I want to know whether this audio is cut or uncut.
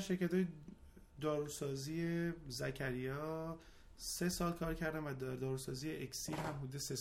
uncut